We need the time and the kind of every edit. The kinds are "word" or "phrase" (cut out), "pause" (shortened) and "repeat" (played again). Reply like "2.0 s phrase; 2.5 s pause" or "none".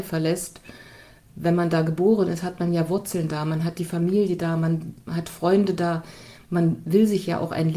none